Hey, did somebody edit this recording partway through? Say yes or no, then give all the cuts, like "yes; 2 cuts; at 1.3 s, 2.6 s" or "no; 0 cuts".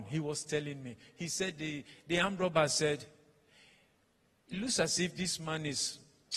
no; 0 cuts